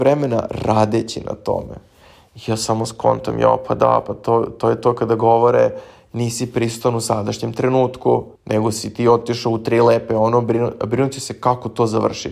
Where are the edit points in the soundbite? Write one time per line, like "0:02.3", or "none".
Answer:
0:08.3